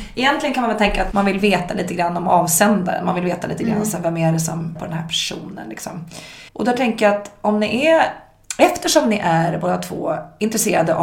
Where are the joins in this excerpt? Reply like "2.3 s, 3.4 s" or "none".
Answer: 1.1 s, 4.8 s, 6.5 s

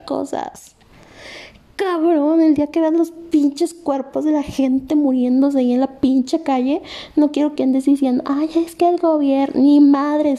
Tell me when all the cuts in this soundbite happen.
none

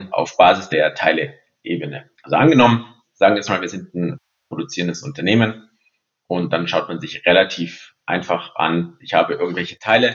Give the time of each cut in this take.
none

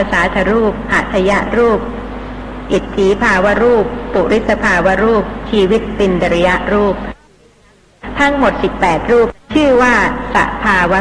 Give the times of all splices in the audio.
9.4 s

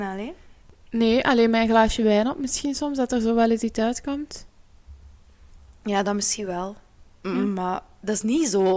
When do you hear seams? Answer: none

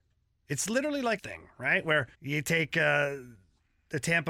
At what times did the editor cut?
1.2 s, 2.1 s

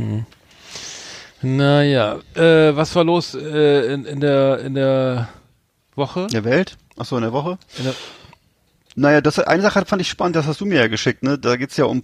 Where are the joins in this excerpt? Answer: none

